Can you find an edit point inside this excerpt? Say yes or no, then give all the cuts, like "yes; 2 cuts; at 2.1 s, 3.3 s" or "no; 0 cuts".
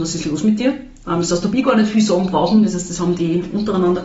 no; 0 cuts